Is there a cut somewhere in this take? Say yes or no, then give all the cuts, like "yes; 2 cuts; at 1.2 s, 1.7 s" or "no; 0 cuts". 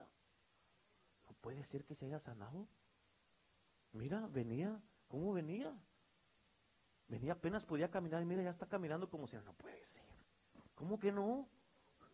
no; 0 cuts